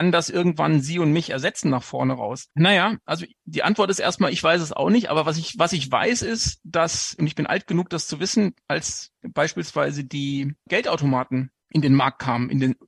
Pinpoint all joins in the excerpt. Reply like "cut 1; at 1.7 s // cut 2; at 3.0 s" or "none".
cut 1; at 2.5 s